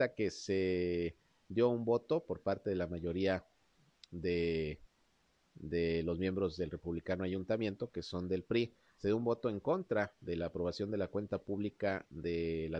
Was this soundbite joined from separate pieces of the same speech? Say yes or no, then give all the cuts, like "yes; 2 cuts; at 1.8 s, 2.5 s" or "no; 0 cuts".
no; 0 cuts